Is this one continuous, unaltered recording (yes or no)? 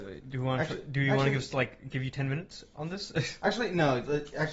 yes